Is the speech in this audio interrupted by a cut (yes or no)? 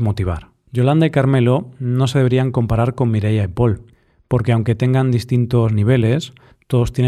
no